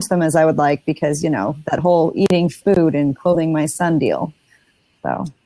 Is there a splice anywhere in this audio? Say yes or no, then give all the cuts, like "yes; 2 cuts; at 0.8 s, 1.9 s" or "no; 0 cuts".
no; 0 cuts